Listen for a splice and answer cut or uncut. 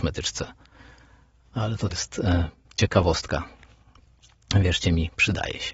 cut